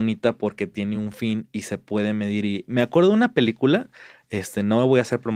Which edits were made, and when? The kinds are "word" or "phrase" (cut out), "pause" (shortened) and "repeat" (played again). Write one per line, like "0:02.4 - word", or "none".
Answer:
none